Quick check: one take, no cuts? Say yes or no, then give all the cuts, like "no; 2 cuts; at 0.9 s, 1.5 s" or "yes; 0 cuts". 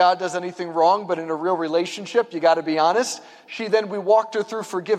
yes; 0 cuts